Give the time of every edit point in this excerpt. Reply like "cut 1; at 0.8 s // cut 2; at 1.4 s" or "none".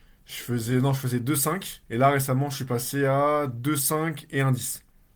cut 1; at 1.8 s